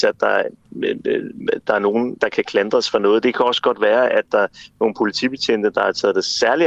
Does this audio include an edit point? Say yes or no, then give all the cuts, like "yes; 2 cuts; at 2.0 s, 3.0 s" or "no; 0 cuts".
yes; 1 cut; at 2.2 s